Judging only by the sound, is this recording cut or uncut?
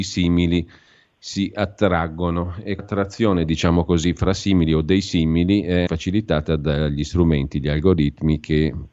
cut